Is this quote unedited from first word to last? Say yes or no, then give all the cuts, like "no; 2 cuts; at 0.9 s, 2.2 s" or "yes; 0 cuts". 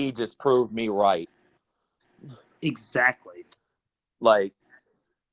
yes; 0 cuts